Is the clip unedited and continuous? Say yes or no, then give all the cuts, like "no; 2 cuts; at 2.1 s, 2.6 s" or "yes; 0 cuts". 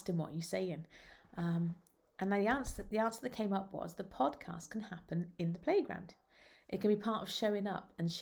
yes; 0 cuts